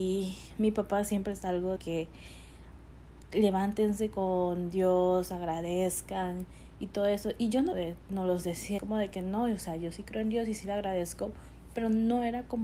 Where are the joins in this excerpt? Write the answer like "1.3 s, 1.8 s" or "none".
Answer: 1.8 s, 7.7 s, 8.8 s